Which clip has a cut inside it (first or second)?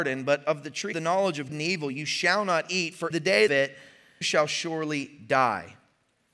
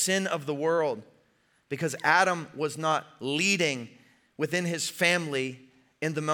first